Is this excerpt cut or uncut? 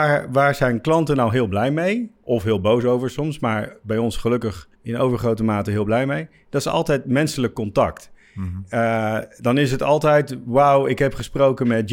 cut